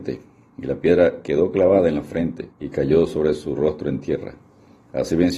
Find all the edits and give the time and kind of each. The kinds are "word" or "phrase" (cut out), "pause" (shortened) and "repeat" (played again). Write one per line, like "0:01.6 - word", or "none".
0:02.5 - pause